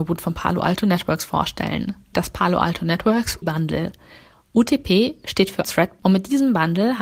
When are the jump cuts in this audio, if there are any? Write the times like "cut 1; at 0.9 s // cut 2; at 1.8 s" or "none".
cut 1; at 2.1 s // cut 2; at 3.4 s // cut 3; at 5.6 s // cut 4; at 6.0 s